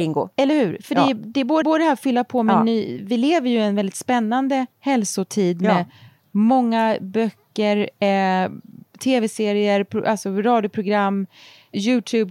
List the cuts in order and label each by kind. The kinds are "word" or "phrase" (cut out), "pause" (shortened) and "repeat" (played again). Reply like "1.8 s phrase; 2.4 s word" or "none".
1.6 s repeat; 4.7 s pause